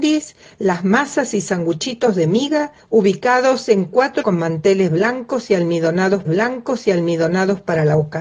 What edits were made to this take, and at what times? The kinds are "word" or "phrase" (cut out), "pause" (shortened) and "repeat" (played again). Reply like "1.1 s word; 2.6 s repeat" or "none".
2.8 s pause; 4.2 s word; 6.3 s repeat